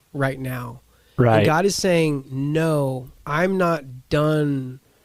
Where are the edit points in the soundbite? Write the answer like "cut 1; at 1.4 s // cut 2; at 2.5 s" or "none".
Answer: none

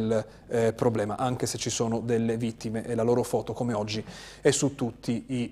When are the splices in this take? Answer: none

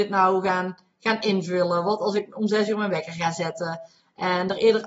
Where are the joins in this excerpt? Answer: none

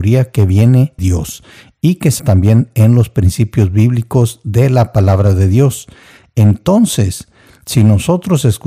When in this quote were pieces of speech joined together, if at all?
cut 1; at 1.0 s // cut 2; at 2.2 s

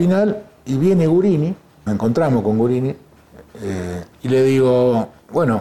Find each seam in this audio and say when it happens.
cut 1; at 1.9 s // cut 2; at 4.1 s

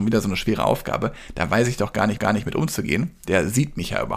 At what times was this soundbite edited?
cut 1; at 2.2 s

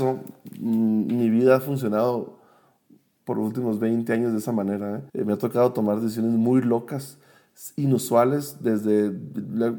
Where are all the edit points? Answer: cut 1; at 5.1 s

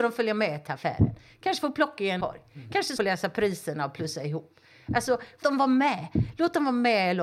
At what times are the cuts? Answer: cut 1; at 2.2 s // cut 2; at 3.0 s // cut 3; at 5.4 s

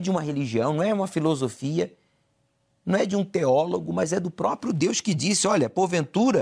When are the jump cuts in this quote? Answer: none

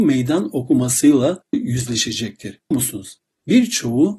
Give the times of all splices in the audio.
cut 1; at 1.5 s // cut 2; at 2.7 s

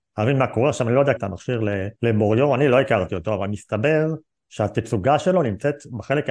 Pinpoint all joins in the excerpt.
cut 1; at 1.2 s // cut 2; at 2.0 s

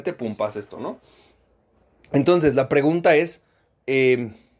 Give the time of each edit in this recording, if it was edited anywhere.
none

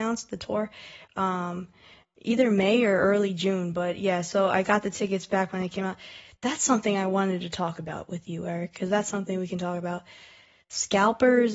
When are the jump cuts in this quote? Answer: none

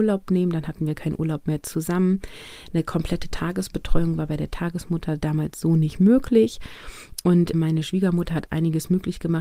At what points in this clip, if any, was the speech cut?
cut 1; at 7.5 s

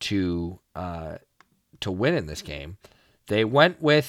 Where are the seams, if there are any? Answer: none

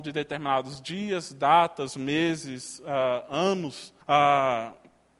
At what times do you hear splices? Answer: cut 1; at 4.0 s

